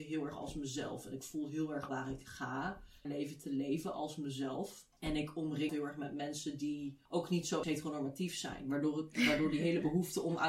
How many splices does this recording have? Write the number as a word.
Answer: five